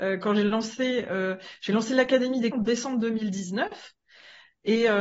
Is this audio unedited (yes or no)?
no